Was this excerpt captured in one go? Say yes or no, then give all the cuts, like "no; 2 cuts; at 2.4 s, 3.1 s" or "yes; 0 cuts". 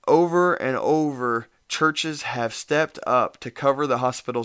yes; 0 cuts